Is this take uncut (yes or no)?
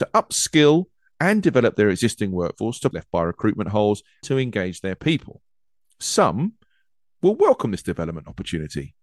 no